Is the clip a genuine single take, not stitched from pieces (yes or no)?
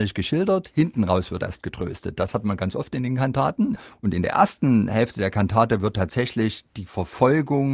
yes